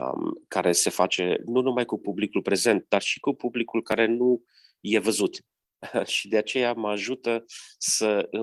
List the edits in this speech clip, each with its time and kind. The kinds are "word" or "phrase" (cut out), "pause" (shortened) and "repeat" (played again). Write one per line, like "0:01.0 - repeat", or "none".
none